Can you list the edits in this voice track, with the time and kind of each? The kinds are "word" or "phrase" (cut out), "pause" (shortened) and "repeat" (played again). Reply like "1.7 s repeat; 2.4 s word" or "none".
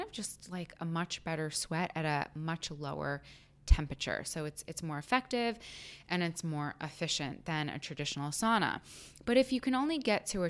none